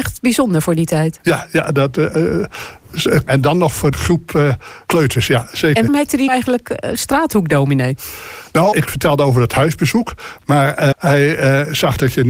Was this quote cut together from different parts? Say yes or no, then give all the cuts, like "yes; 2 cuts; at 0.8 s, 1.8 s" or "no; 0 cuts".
yes; 7 cuts; at 3.3 s, 3.9 s, 4.9 s, 5.9 s, 6.3 s, 8.7 s, 10.9 s